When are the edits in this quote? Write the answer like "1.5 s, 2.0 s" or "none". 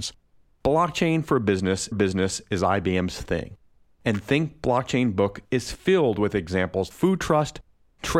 1.9 s, 5.5 s, 6.9 s